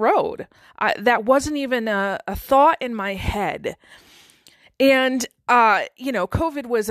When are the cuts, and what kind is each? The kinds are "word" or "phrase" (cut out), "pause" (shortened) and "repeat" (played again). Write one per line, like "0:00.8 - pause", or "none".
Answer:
none